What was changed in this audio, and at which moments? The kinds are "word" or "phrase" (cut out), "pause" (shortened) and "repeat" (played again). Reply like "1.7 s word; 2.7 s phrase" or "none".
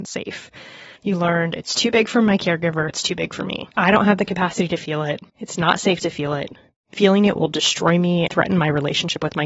1.0 s pause; 2.9 s word; 3.7 s pause; 5.3 s pause; 8.3 s word